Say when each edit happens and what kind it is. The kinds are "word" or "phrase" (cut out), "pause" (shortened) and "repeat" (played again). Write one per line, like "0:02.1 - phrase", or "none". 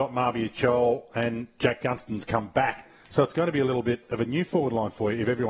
none